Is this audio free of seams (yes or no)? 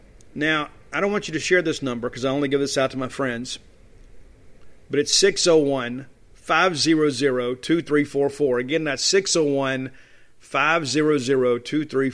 yes